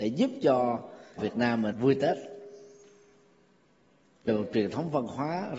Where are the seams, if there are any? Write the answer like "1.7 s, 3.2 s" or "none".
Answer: 1.2 s, 1.7 s, 4.3 s